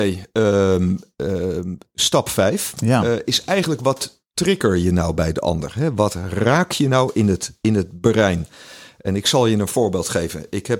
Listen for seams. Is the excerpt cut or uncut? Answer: uncut